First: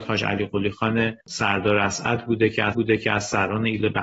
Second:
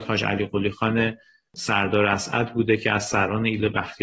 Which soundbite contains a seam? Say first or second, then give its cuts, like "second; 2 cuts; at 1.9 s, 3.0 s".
first; 2 cuts; at 1.2 s, 2.7 s